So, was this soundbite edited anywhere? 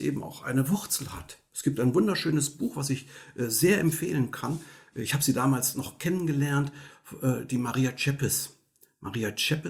no; 0 cuts

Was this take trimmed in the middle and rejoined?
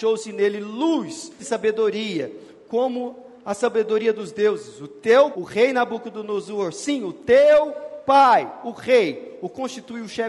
yes; 2 cuts; at 1.4 s, 5.3 s

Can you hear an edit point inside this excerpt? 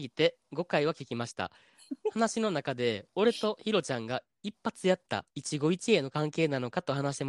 yes; 1 cut; at 5.3 s

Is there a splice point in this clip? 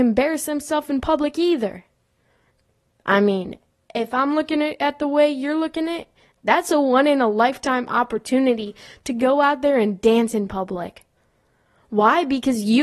no; 0 cuts

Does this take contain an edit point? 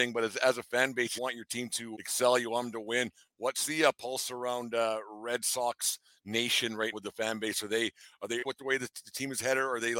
yes; 4 cuts; at 1.2 s, 1.9 s, 6.9 s, 8.4 s

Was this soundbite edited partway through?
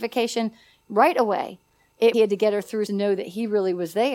yes; 2 cuts; at 2.1 s, 2.9 s

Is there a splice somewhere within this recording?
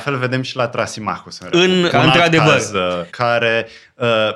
yes; 2 cuts; at 1.9 s, 3.1 s

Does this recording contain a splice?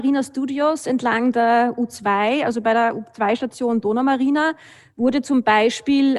no; 0 cuts

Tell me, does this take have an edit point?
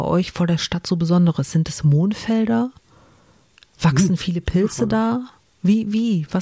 no; 0 cuts

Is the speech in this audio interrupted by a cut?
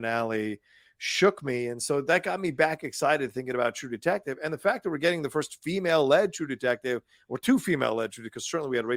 no; 0 cuts

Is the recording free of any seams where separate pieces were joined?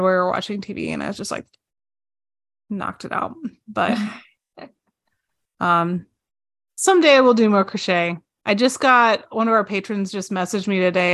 yes; 0 cuts

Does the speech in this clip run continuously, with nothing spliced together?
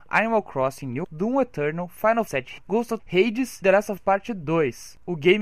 no; 6 cuts; at 1.0 s, 2.3 s, 2.6 s, 3.0 s, 3.6 s, 4.0 s

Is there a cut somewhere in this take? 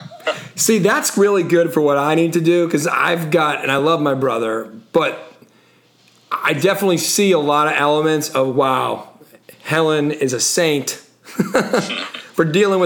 no; 0 cuts

